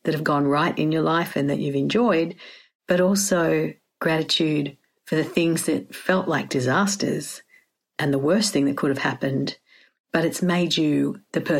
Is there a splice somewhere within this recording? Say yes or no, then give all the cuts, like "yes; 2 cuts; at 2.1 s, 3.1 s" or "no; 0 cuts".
no; 0 cuts